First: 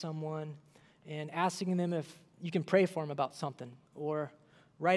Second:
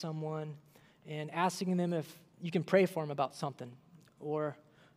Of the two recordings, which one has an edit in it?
first; 1 cut; at 3.9 s

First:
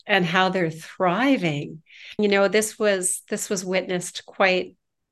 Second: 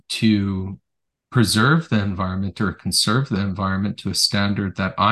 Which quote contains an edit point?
first; 1 cut; at 2.2 s

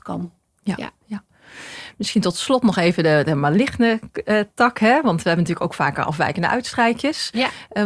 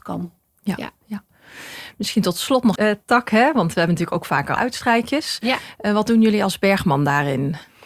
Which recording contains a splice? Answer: second; 2 cuts; at 2.8 s, 4.6 s

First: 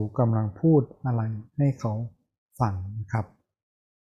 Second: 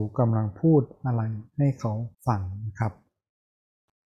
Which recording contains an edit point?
second; 1 cut; at 2.1 s

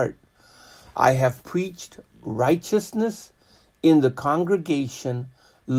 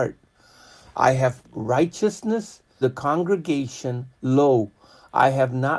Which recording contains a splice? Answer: second; 3 cuts; at 1.4 s, 2.8 s, 4.1 s

